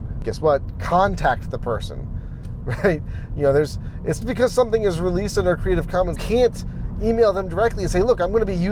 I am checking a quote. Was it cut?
yes; 2 cuts; at 4.2 s, 6.2 s

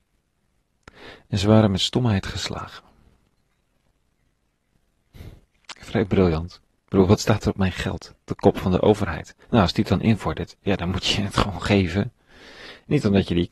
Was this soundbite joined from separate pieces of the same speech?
no; 0 cuts

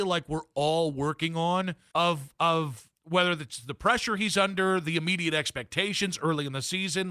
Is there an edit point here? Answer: yes; 2 cuts; at 1.9 s, 3.0 s

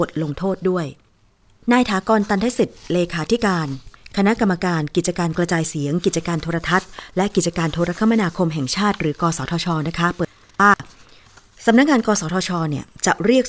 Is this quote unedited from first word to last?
yes; 0 cuts

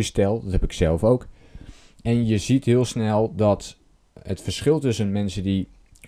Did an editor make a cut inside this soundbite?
no; 0 cuts

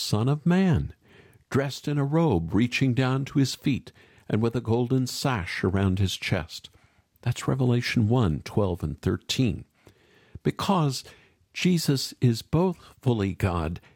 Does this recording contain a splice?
no; 0 cuts

